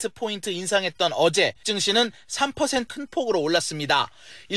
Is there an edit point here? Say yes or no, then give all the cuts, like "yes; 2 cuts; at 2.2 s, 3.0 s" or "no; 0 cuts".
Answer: yes; 2 cuts; at 1.6 s, 2.9 s